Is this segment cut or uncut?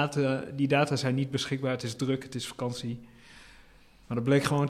uncut